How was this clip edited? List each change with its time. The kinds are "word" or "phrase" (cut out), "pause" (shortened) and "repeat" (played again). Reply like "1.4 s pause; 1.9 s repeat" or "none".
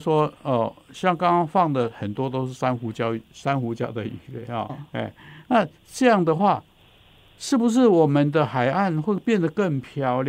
4.7 s word

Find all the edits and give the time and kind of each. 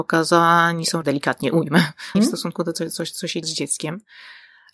1.0 s phrase; 2.1 s word; 2.7 s word; 3.4 s word

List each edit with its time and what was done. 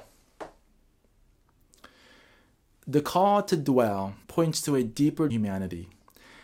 4.2 s pause; 5.3 s phrase

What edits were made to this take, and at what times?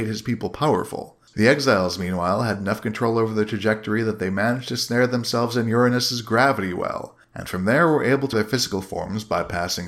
8.3 s word

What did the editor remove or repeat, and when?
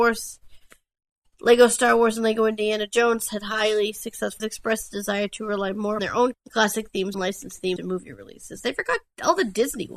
4.4 s phrase; 6.0 s word; 6.3 s word; 7.1 s phrase; 7.8 s phrase

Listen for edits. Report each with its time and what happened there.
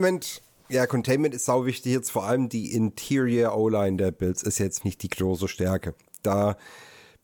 4.8 s word

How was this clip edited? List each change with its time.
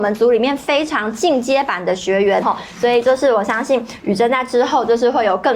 2.4 s word

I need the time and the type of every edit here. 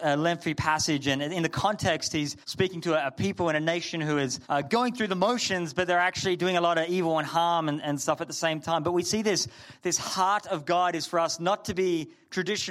2.4 s pause; 4.4 s pause

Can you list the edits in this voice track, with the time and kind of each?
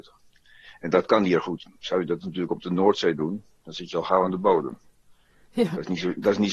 none

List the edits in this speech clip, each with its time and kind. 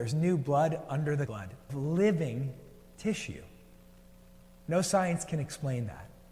1.3 s word; 1.7 s word

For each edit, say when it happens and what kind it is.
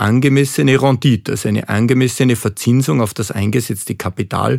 none

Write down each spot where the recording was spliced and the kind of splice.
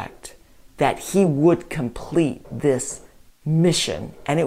none

